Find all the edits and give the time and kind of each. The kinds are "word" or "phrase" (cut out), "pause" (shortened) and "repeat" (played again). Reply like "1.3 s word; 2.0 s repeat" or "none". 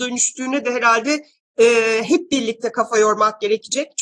none

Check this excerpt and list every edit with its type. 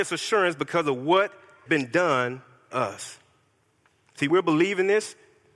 1.7 s word; 2.7 s word; 4.3 s word

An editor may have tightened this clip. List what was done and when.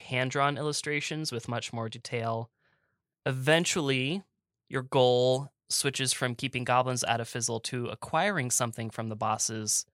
none

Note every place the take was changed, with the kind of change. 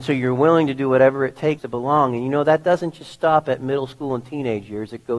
1.6 s word

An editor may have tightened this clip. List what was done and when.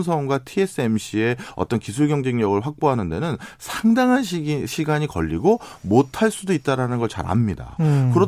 none

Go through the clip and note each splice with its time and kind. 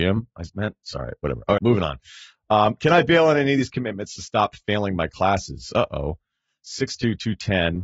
1.6 s word

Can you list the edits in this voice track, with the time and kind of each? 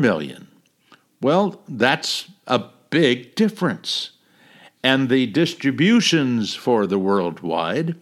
none

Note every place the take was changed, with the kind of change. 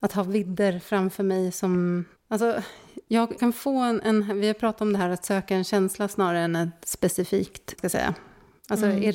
3.4 s phrase; 7.8 s phrase

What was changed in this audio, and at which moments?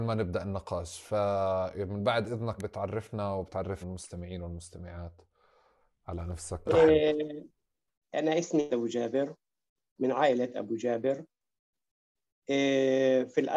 2.6 s word; 3.8 s word; 6.7 s word; 8.7 s word

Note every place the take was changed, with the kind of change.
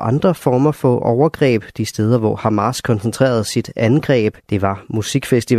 4.4 s pause

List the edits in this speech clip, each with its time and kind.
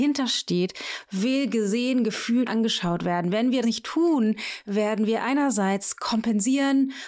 2.5 s word; 3.6 s word

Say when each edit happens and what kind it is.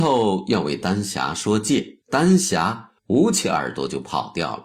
2.0 s pause; 3.0 s pause

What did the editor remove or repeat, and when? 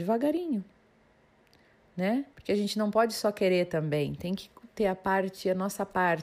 2.3 s pause

